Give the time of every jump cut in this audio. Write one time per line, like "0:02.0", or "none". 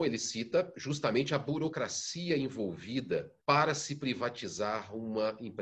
0:03.4